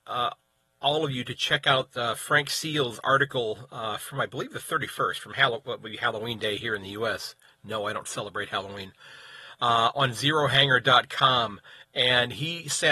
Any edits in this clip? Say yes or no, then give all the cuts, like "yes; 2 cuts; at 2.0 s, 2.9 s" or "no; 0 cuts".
no; 0 cuts